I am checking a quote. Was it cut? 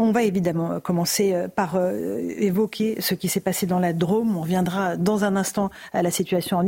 no; 0 cuts

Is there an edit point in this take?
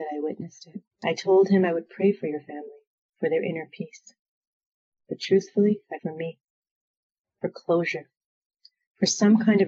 yes; 2 cuts; at 0.9 s, 6.0 s

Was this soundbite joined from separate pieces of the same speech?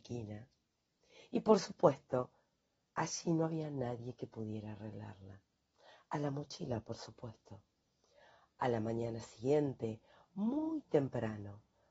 no; 0 cuts

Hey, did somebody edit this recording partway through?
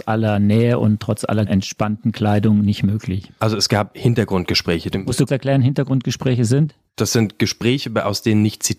yes; 3 cuts; at 1.5 s, 4.9 s, 5.3 s

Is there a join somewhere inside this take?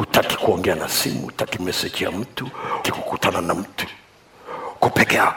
yes; 2 cuts; at 1.6 s, 2.8 s

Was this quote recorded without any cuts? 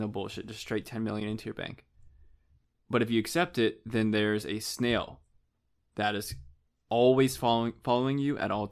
yes; 0 cuts

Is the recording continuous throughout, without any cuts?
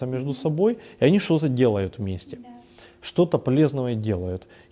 yes; 0 cuts

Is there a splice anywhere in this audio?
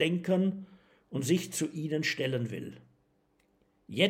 no; 0 cuts

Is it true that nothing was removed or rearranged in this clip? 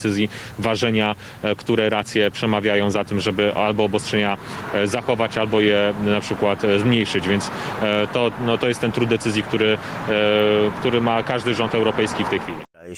yes; 0 cuts

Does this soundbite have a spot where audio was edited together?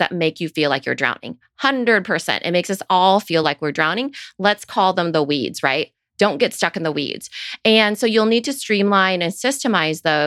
no; 0 cuts

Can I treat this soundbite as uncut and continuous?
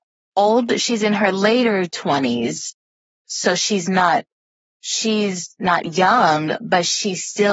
yes; 0 cuts

